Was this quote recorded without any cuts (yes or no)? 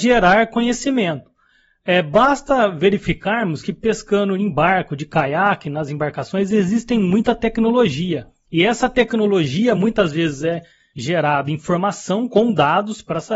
yes